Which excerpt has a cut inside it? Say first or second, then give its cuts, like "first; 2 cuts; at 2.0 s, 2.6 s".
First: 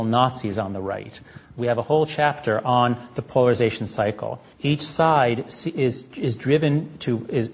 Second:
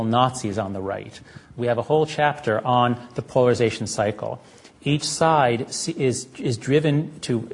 first; 1 cut; at 4.5 s